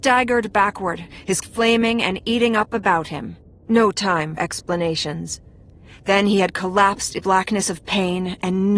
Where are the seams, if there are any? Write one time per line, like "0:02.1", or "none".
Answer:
0:01.4
0:04.4
0:07.2